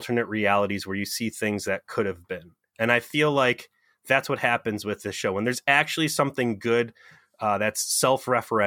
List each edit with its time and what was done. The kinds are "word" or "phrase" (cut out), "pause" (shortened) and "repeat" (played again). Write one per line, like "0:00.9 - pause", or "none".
none